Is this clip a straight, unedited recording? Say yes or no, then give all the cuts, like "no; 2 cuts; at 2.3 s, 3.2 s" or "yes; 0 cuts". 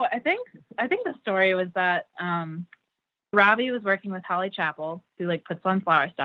no; 1 cut; at 3.3 s